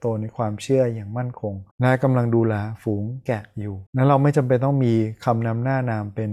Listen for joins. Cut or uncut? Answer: cut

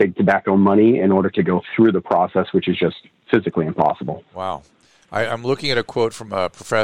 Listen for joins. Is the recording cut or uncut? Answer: uncut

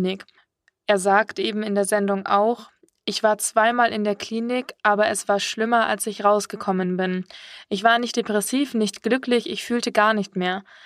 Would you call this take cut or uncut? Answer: uncut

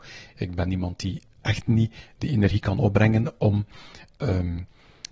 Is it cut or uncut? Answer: uncut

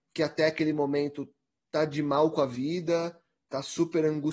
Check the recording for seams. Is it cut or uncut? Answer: uncut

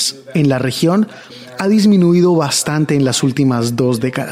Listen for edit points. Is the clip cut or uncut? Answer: uncut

